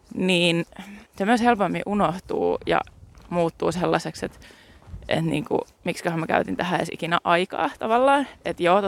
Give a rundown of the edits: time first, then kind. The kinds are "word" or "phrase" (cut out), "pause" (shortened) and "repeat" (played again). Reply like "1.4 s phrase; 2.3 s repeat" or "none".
1.1 s pause